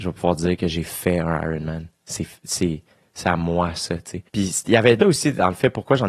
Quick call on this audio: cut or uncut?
cut